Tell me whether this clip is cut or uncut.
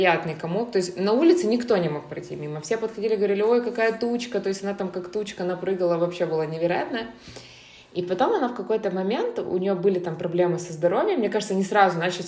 uncut